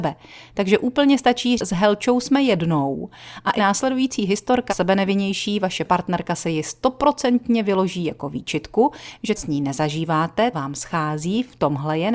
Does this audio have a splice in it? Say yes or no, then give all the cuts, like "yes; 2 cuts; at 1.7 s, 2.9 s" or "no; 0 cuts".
yes; 5 cuts; at 1.6 s, 3.6 s, 4.7 s, 9.4 s, 10.5 s